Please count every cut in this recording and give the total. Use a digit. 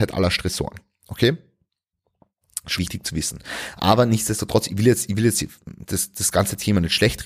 2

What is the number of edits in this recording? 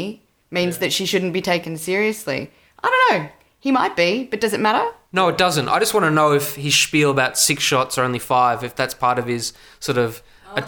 0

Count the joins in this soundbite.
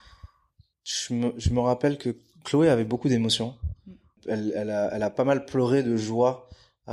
0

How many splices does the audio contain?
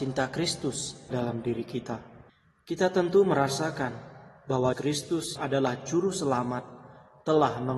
4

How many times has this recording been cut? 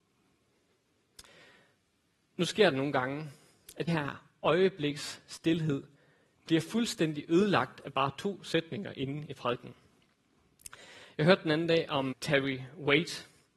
3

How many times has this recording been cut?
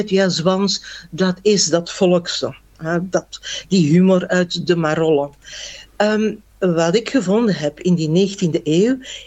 1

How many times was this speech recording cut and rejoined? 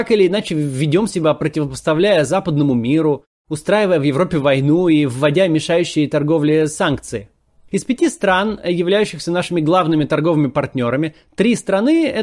0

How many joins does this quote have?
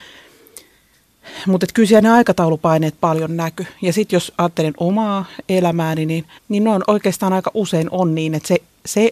1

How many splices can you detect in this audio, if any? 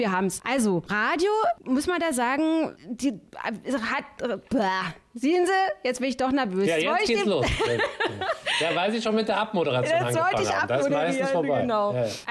1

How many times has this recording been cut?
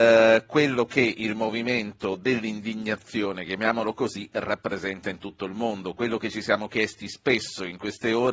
0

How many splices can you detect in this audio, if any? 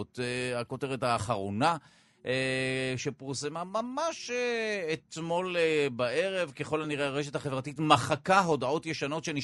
0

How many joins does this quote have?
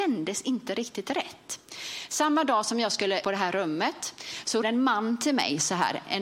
2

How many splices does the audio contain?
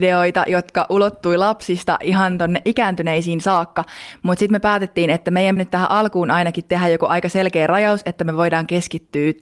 1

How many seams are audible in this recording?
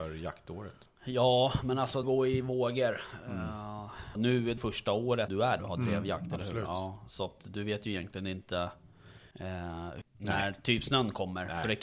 8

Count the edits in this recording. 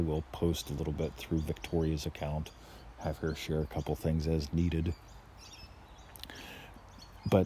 0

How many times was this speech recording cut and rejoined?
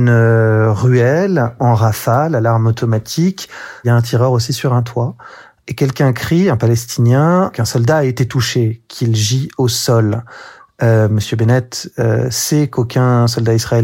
0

